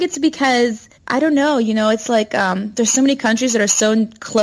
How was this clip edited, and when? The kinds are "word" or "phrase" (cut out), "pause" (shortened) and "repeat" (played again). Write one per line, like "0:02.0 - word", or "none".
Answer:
0:00.9 - pause